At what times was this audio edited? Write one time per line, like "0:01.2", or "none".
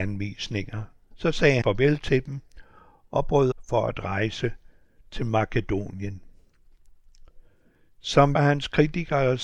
0:01.6
0:03.5
0:08.4